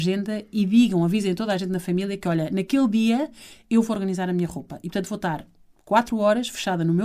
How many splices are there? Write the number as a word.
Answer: zero